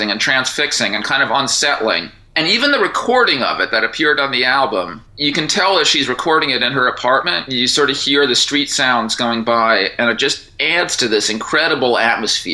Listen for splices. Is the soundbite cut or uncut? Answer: uncut